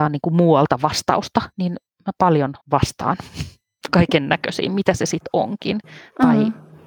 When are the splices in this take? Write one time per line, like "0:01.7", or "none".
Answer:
0:01.5
0:02.6